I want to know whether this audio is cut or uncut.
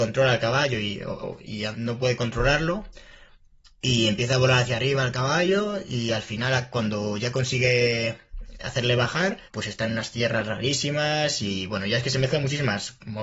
cut